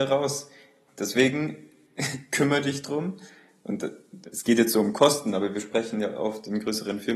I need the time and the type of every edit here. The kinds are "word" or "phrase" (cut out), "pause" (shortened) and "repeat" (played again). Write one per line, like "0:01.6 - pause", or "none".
none